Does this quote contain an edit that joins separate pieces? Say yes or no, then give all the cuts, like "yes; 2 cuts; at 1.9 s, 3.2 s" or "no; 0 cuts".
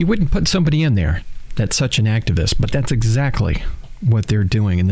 no; 0 cuts